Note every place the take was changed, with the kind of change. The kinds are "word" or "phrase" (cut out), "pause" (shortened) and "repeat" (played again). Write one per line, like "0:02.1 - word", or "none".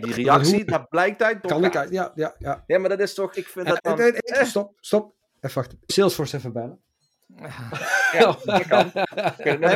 0:01.4 - phrase
0:03.3 - word
0:03.8 - phrase
0:05.9 - phrase